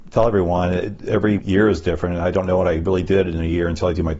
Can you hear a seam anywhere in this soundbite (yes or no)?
yes